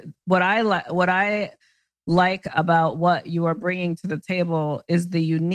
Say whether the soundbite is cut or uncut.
uncut